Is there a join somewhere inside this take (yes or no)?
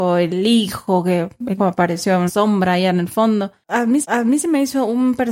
yes